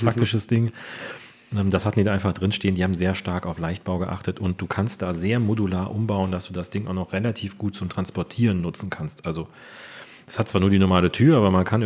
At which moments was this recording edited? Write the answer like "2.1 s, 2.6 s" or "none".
none